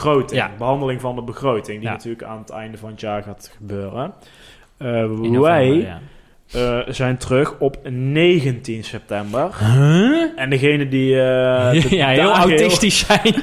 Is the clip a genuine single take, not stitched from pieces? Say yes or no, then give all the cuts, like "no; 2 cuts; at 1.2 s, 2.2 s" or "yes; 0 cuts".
yes; 0 cuts